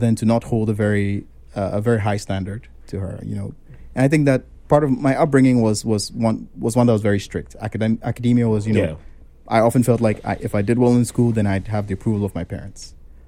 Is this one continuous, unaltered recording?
yes; 0 cuts

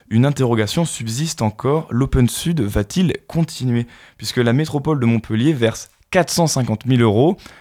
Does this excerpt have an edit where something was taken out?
no; 0 cuts

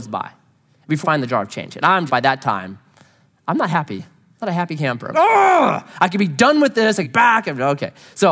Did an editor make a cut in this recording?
yes; 4 cuts; at 1.0 s, 2.1 s, 5.1 s, 7.0 s

